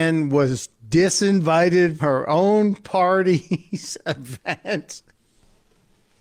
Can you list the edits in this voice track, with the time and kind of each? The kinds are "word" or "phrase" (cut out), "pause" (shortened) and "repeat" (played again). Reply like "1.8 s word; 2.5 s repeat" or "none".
2.0 s word